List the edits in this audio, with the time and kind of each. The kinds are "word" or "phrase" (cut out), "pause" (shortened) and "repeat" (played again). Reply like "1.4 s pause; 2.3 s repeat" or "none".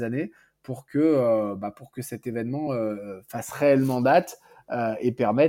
none